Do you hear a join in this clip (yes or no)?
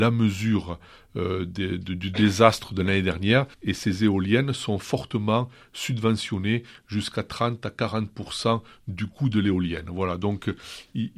yes